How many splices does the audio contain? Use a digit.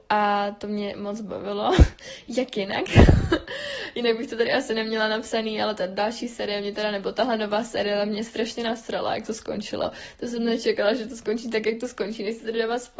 0